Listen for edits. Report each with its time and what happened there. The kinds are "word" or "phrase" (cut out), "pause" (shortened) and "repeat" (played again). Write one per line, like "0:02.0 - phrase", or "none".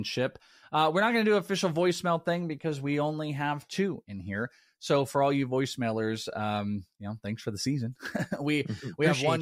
none